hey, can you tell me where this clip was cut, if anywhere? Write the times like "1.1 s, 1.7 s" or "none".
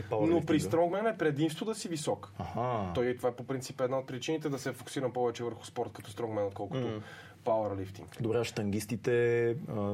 none